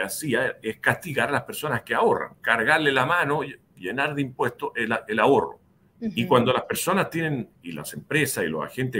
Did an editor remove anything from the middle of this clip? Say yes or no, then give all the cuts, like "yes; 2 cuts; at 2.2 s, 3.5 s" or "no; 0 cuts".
yes; 1 cut; at 5.8 s